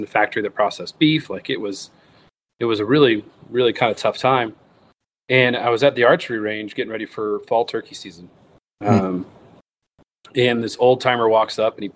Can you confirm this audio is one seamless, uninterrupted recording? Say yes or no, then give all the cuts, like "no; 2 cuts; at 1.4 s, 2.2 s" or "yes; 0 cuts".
yes; 0 cuts